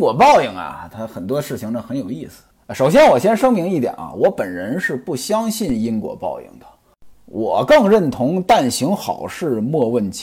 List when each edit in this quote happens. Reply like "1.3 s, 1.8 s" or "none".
2.5 s, 7.1 s